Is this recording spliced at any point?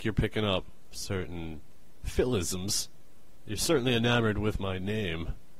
no; 0 cuts

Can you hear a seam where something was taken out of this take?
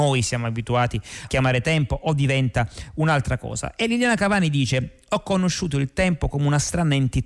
yes; 1 cut; at 1.3 s

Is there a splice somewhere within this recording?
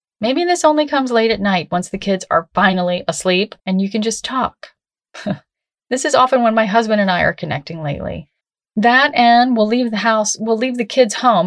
yes; 2 cuts; at 3.6 s, 8.4 s

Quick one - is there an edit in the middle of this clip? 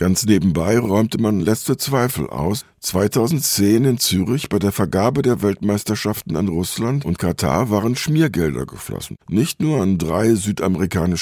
yes; 1 cut; at 9.2 s

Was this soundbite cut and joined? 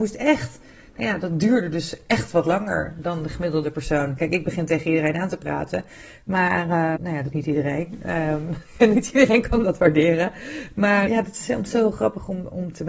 yes; 3 cuts; at 7.0 s, 7.3 s, 11.1 s

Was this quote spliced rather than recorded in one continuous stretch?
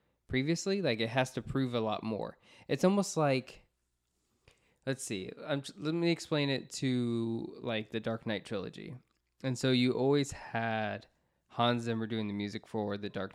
no; 0 cuts

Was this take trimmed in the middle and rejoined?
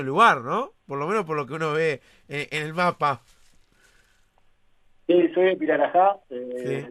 no; 0 cuts

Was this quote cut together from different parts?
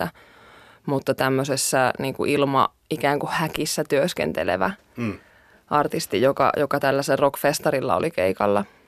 no; 0 cuts

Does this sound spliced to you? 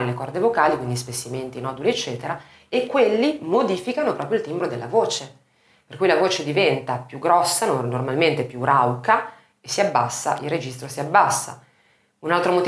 no; 0 cuts

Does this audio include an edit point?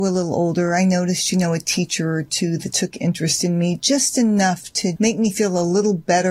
yes; 1 cut; at 5.0 s

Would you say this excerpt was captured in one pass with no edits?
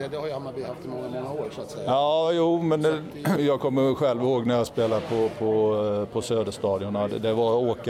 no; 1 cut; at 3.4 s

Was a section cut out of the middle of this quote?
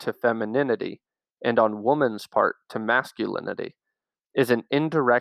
no; 0 cuts

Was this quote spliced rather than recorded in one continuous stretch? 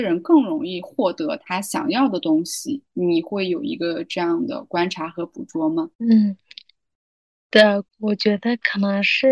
yes; 2 cuts; at 5.9 s, 7.9 s

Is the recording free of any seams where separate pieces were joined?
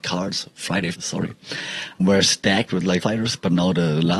no; 3 cuts; at 0.9 s, 2.0 s, 3.0 s

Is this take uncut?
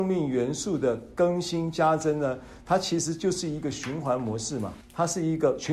no; 1 cut; at 4.8 s

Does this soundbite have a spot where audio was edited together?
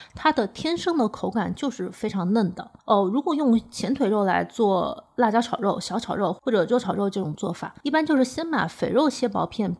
yes; 2 cuts; at 2.8 s, 7.8 s

